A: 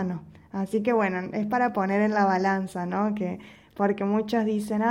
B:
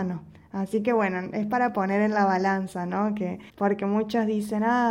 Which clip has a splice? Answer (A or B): B